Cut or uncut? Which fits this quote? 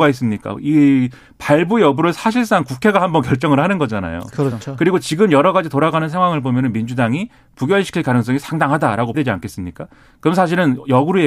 cut